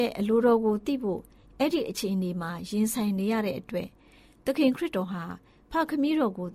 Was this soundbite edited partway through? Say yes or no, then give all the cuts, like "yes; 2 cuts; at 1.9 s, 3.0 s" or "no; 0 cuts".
no; 0 cuts